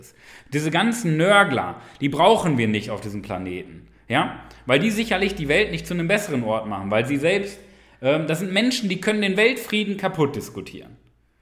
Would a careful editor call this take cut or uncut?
uncut